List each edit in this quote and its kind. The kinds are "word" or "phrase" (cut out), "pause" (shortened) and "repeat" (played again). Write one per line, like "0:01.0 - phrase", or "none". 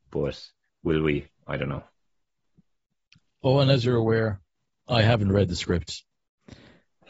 none